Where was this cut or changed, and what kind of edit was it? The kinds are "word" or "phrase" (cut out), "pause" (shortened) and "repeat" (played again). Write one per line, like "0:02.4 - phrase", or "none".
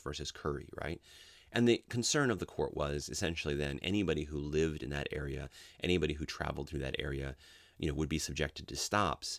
none